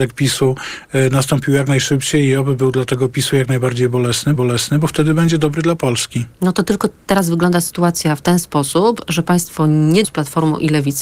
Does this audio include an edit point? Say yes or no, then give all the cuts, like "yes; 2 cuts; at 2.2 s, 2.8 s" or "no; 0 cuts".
yes; 2 cuts; at 4.4 s, 10.0 s